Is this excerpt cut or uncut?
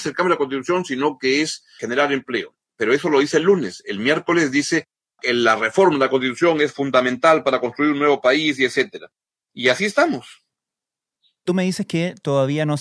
uncut